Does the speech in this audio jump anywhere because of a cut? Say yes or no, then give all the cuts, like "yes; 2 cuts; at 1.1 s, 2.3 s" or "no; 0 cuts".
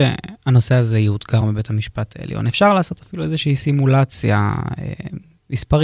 no; 0 cuts